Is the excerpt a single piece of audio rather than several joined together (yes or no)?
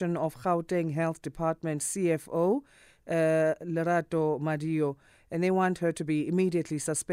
yes